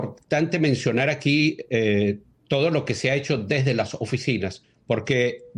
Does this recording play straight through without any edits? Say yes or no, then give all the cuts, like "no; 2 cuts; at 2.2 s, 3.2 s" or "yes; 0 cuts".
yes; 0 cuts